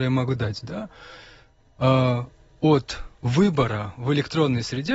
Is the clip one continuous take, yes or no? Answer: yes